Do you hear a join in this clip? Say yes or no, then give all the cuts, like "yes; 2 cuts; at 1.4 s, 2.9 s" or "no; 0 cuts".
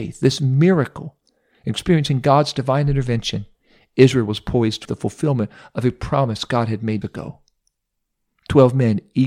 yes; 2 cuts; at 4.9 s, 7.0 s